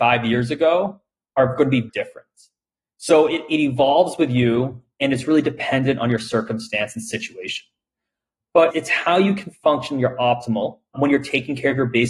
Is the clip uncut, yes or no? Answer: no